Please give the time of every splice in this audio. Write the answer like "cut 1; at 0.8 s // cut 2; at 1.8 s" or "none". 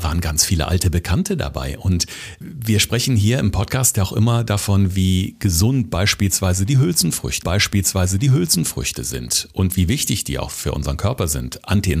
cut 1; at 2.4 s // cut 2; at 7.4 s